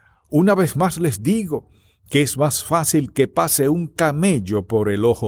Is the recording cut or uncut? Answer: uncut